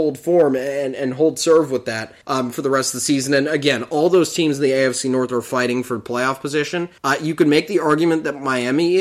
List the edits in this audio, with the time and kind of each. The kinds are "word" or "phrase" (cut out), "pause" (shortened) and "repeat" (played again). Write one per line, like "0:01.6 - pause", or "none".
0:02.2 - pause
0:07.0 - pause